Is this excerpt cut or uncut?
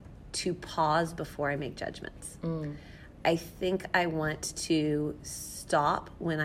uncut